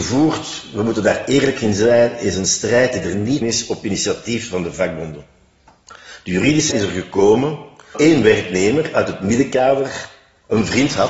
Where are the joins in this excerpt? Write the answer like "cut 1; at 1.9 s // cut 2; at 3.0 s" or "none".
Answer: cut 1; at 3.4 s // cut 2; at 6.7 s // cut 3; at 7.9 s